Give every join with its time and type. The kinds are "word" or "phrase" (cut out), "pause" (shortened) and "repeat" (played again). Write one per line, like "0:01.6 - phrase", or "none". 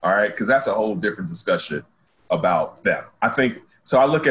none

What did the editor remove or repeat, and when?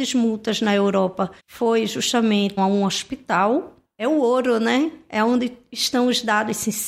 0:01.4 - pause
0:02.6 - phrase
0:03.8 - word

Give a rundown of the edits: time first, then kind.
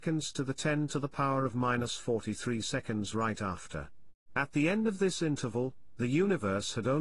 0:04.2 - pause

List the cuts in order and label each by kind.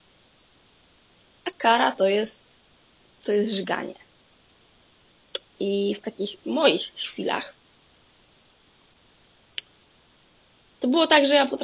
0:02.6 - pause
0:06.4 - word

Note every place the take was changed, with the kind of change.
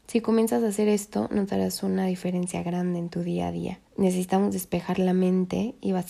0:03.9 - pause

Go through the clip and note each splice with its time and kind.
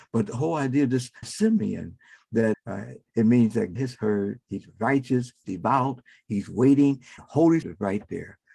0:01.2 - word
0:02.5 - word
0:03.8 - word
0:05.4 - word
0:07.2 - word
0:07.6 - word

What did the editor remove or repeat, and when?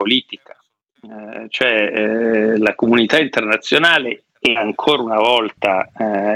0:04.3 - pause

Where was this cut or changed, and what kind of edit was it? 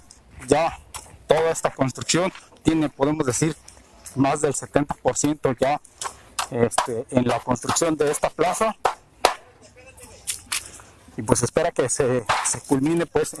none

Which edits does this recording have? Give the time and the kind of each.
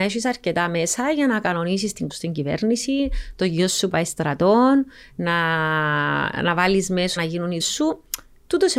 0:02.1 - phrase
0:03.9 - word
0:07.2 - word
0:07.6 - word

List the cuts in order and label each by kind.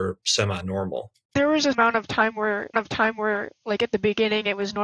0:01.7 - word
0:02.7 - repeat

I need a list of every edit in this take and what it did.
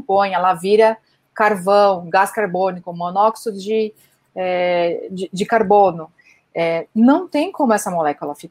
none

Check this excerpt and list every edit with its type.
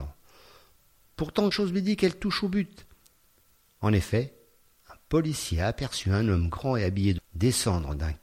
0:01.5 - word
0:07.2 - word

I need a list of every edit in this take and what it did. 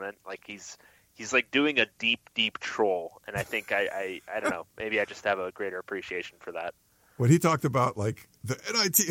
none

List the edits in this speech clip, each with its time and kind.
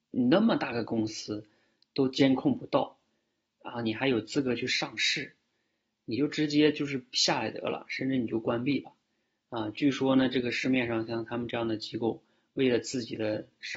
none

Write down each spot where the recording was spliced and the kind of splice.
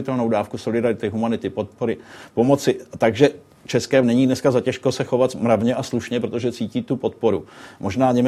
0:04.0 - word

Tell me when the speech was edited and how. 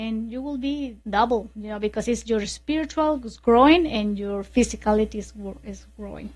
0:01.0 - pause

